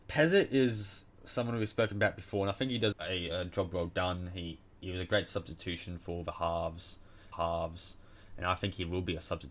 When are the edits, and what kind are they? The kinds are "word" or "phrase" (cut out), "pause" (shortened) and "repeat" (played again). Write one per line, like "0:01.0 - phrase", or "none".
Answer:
0:02.9 - word
0:07.3 - repeat